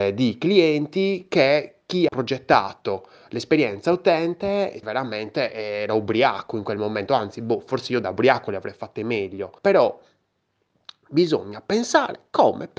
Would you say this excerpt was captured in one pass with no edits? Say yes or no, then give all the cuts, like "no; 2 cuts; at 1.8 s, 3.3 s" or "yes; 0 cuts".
no; 3 cuts; at 2.1 s, 4.8 s, 9.6 s